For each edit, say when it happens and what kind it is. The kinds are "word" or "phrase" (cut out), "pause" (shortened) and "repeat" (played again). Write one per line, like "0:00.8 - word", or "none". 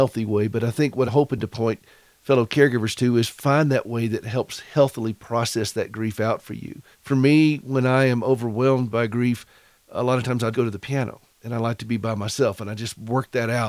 0:01.1 - word
0:06.9 - pause
0:10.5 - word
0:11.3 - pause

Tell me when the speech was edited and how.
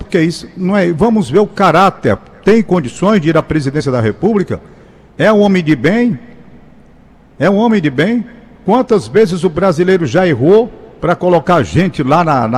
none

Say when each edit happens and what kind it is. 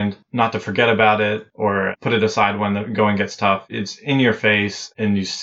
none

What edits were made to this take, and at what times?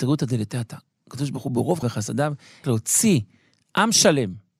0:01.8 - word
0:02.6 - word

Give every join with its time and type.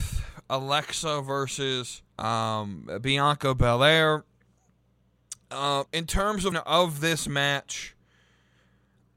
0:02.1 - pause
0:05.9 - word
0:06.5 - phrase

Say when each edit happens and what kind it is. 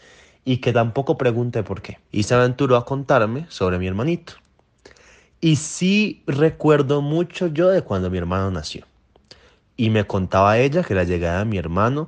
0:02.1 - pause

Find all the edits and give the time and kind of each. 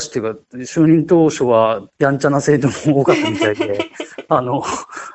0:01.9 - pause

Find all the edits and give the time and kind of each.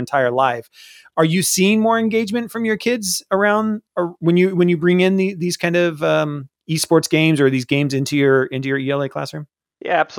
0:03.9 - pause
0:06.6 - pause

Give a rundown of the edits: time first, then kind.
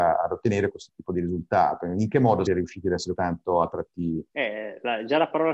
0:02.5 - word
0:03.1 - word
0:04.3 - pause

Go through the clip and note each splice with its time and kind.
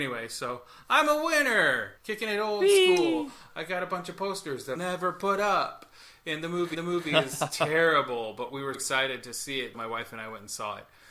0:02.0 - pause
0:04.8 - word
0:06.7 - repeat
0:08.7 - word
0:09.7 - word

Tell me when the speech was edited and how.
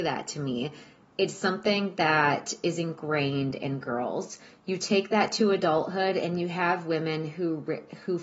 none

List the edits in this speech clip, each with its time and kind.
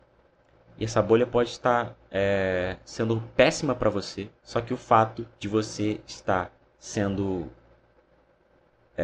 0:04.4 - pause
0:05.3 - pause
0:06.7 - pause

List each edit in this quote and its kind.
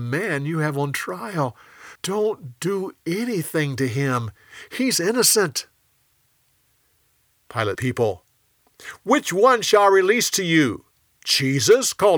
0:02.0 - pause
0:07.7 - phrase

